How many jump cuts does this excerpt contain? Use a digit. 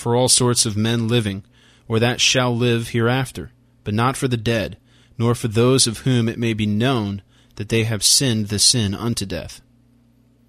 0